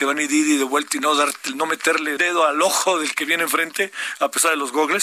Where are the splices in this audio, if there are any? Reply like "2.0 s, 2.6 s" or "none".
2.2 s